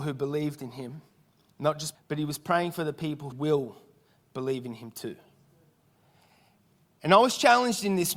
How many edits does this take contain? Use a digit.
2